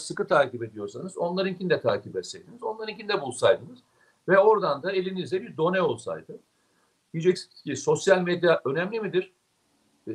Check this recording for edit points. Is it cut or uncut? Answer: uncut